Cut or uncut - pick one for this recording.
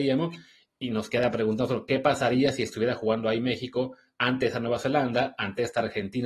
uncut